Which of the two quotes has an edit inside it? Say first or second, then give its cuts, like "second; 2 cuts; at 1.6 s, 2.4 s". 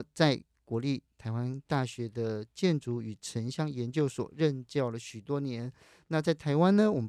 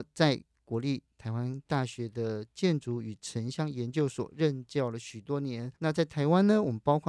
second; 1 cut; at 5.8 s